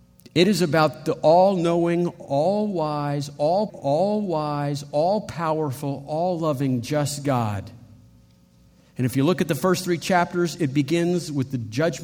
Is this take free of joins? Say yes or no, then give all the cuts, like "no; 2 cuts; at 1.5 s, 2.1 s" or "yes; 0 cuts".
no; 1 cut; at 3.7 s